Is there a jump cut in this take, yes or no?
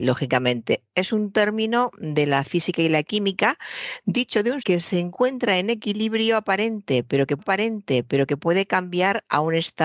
yes